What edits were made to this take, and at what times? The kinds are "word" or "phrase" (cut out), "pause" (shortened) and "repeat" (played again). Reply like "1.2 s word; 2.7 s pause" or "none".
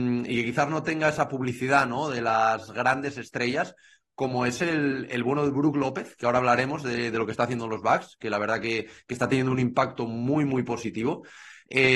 none